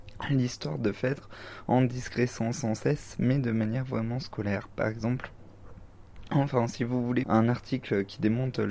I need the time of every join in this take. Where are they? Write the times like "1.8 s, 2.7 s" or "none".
7.2 s